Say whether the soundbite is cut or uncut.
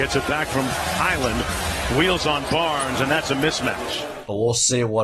uncut